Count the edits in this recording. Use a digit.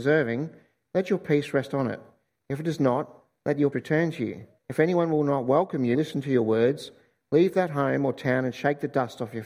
3